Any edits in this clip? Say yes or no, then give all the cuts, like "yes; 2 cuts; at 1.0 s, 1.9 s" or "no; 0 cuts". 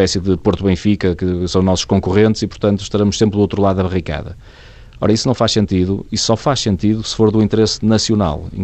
no; 0 cuts